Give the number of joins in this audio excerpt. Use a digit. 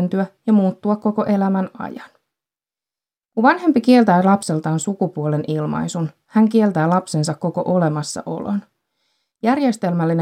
0